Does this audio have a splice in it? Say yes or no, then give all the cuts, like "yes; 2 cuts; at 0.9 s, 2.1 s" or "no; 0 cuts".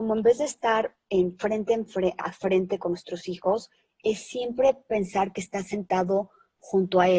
no; 0 cuts